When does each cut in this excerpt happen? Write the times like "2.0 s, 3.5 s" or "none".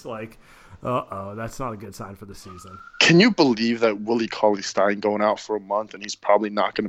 none